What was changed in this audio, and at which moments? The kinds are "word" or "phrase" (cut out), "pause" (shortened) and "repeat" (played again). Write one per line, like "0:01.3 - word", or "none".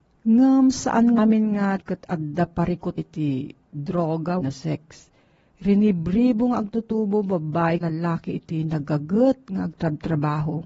0:01.2 - word
0:01.8 - word
0:03.0 - word
0:04.4 - word
0:07.8 - word